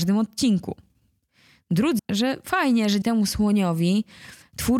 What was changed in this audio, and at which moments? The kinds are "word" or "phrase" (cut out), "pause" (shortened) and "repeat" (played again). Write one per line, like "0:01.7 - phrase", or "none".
0:02.0 - word
0:03.0 - word